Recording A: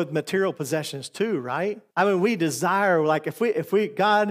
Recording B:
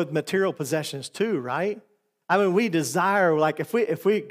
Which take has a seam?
A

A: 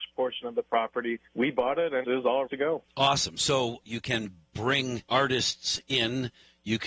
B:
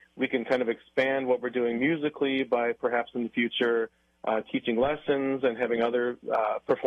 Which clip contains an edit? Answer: A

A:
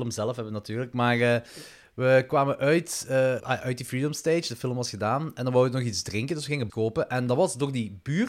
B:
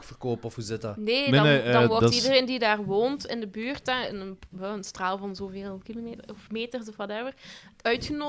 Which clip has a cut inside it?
A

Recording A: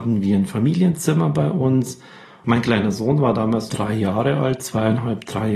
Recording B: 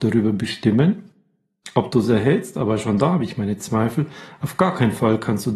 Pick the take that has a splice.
A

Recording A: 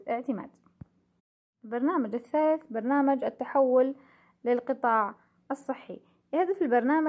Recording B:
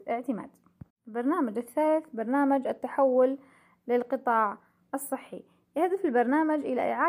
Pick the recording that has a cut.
B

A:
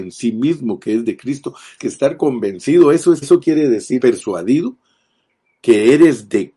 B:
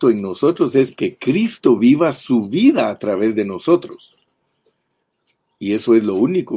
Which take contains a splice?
A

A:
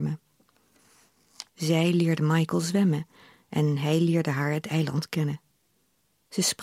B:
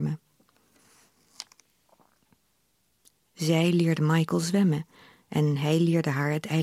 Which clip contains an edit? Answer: A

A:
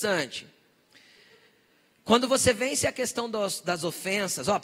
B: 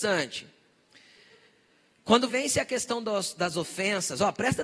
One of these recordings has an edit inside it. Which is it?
B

